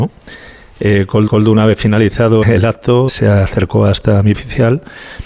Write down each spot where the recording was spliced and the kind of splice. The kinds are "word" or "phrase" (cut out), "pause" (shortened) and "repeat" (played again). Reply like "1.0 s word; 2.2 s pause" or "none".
1.3 s repeat; 2.4 s word; 3.1 s word; 4.3 s word